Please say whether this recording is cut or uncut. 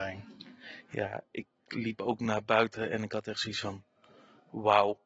uncut